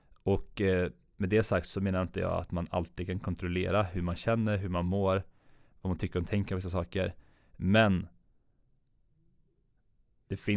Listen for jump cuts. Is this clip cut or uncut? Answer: uncut